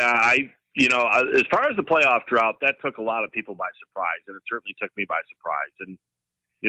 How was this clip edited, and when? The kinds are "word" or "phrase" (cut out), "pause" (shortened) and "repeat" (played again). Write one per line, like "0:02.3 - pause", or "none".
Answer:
none

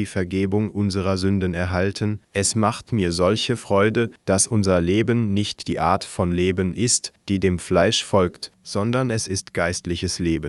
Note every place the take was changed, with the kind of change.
0:02.2 - pause

